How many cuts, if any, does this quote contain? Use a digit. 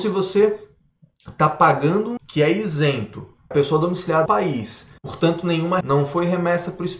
5